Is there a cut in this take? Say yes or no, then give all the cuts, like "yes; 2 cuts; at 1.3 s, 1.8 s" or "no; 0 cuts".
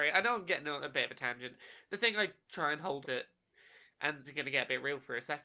yes; 2 cuts; at 3.0 s, 4.2 s